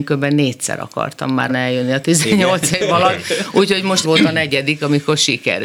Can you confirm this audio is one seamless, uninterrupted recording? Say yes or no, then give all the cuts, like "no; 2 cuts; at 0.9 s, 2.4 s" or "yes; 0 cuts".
no; 2 cuts; at 1.5 s, 4.0 s